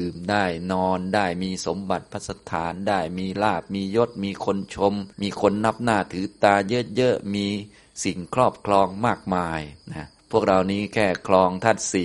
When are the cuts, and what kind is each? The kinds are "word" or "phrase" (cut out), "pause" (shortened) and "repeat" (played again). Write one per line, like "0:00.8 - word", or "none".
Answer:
0:05.1 - pause
0:09.8 - pause
0:10.2 - pause